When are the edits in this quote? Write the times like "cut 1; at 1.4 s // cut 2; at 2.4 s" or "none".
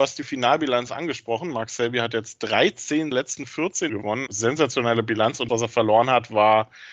cut 1; at 3.1 s // cut 2; at 3.9 s // cut 3; at 4.3 s // cut 4; at 5.5 s